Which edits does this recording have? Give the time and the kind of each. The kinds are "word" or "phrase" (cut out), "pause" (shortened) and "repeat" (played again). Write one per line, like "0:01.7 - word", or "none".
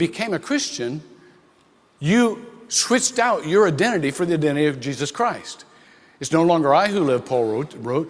none